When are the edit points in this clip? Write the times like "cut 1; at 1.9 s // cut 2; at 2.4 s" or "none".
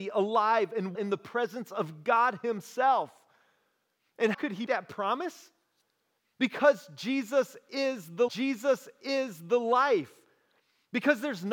cut 1; at 0.9 s // cut 2; at 4.3 s // cut 3; at 4.7 s // cut 4; at 8.3 s

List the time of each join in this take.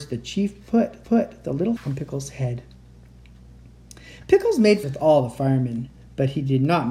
cut 1; at 1.0 s // cut 2; at 1.8 s // cut 3; at 4.8 s

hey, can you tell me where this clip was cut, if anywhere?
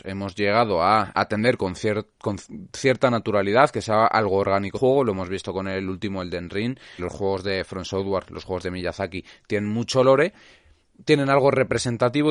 cut 1; at 1.1 s // cut 2; at 4.7 s // cut 3; at 7.0 s

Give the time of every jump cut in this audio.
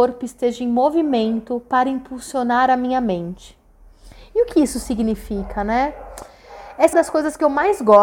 cut 1; at 6.9 s

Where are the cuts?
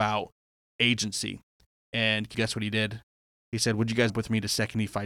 cut 1; at 2.3 s // cut 2; at 4.1 s

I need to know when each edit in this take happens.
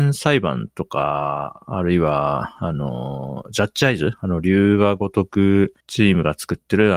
cut 1; at 5.8 s

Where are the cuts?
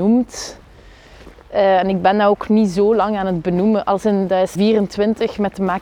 cut 1; at 2.5 s // cut 2; at 4.5 s

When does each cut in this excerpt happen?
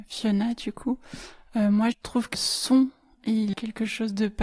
cut 1; at 1.9 s // cut 2; at 2.3 s // cut 3; at 3.5 s

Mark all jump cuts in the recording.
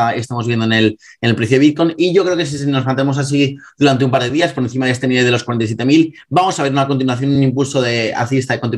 none

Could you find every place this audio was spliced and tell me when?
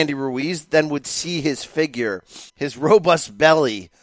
cut 1; at 2.5 s

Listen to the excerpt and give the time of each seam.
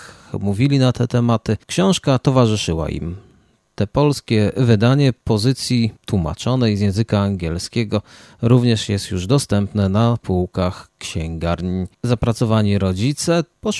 cut 1; at 1.6 s // cut 2; at 6.0 s // cut 3; at 11.9 s

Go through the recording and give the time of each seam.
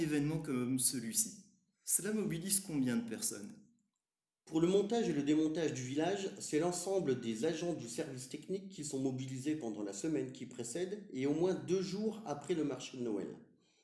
none

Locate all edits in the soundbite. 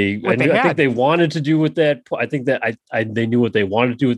none

